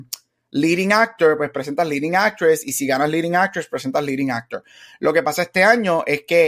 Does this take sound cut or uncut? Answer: uncut